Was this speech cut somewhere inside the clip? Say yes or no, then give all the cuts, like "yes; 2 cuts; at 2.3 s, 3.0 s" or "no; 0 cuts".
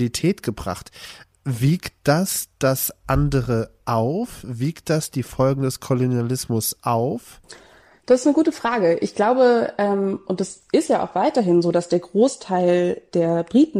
no; 0 cuts